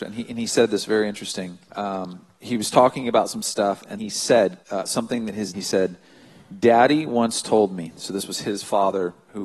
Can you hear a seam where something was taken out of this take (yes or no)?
yes